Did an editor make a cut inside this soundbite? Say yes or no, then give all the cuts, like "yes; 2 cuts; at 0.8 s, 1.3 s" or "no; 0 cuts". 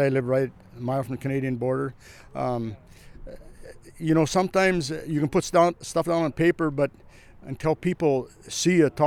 no; 0 cuts